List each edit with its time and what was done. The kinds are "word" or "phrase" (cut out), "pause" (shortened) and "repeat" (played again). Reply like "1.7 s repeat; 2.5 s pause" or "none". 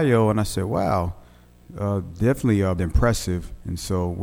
2.8 s word